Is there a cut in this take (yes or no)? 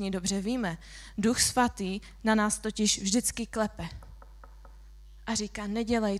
no